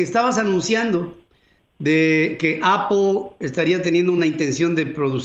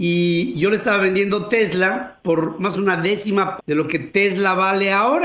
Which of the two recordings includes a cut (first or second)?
second